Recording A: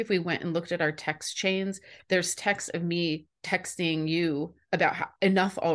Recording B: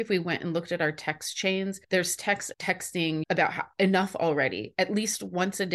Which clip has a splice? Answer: B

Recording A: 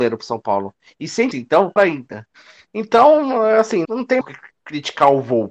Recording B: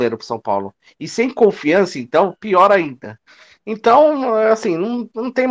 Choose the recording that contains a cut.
A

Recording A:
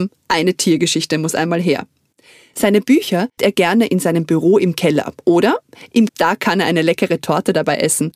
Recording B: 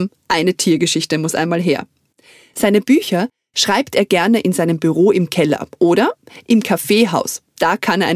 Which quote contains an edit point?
A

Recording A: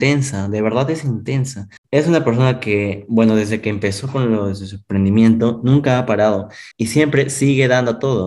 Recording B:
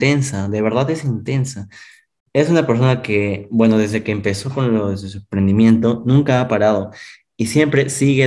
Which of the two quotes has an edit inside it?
A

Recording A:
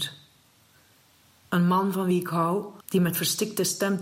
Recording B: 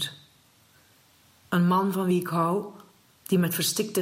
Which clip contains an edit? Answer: A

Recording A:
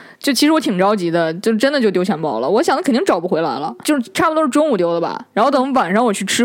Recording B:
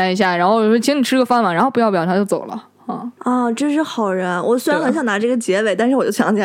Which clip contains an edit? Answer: A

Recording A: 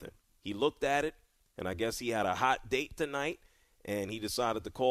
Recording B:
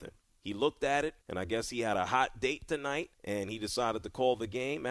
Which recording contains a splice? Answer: B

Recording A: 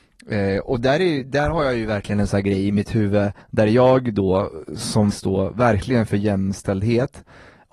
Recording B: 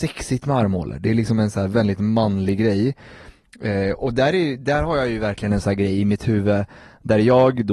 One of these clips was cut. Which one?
A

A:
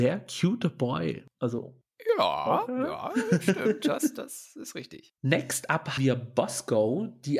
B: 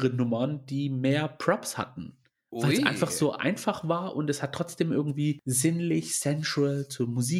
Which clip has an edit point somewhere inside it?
A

